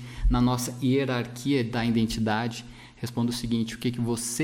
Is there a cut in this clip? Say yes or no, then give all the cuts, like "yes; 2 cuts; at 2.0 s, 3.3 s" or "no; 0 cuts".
no; 0 cuts